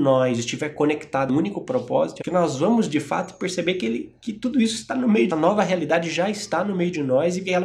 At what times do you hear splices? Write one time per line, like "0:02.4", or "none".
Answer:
0:01.3
0:02.2
0:05.3